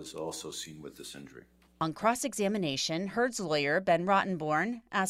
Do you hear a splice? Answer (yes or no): yes